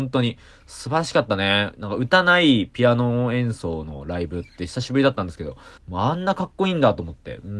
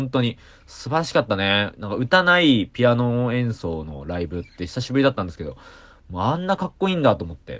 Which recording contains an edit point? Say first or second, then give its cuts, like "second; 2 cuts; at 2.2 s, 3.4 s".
first; 1 cut; at 5.8 s